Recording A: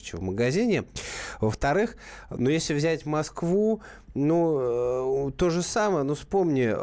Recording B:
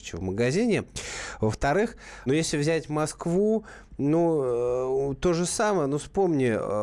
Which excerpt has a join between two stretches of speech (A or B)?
B